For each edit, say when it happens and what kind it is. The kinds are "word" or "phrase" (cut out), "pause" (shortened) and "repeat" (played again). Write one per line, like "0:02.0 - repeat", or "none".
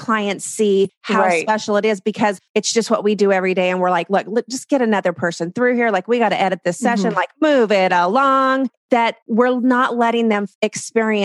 none